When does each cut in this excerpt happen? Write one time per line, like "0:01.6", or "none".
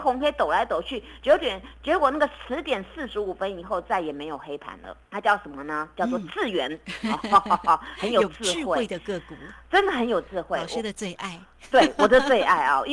0:05.1